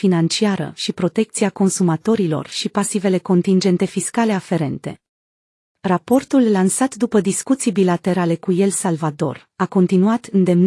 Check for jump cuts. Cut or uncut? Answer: uncut